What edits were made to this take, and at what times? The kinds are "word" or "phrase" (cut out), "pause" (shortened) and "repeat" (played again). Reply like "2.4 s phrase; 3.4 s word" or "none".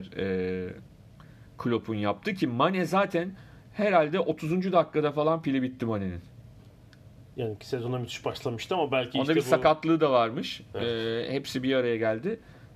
1.5 s pause

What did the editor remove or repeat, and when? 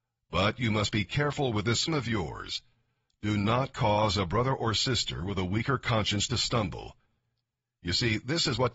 1.9 s word

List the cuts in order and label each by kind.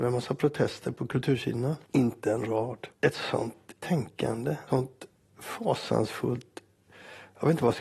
1.8 s pause; 2.9 s pause; 3.8 s word; 4.7 s word

